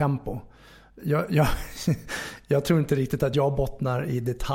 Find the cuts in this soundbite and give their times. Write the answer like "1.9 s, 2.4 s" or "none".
none